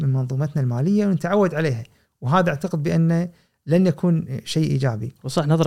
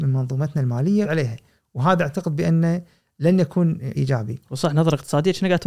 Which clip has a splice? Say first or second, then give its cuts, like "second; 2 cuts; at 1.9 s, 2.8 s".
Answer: second; 2 cuts; at 1.0 s, 3.9 s